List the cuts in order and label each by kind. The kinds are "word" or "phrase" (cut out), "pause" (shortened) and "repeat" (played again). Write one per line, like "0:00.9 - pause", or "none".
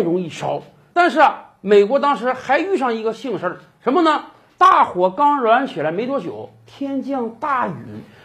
0:04.5 - pause

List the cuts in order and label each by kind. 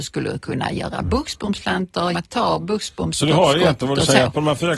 0:02.1 - word

